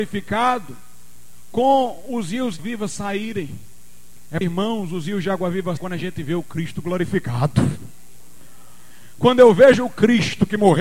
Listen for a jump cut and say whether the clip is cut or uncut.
cut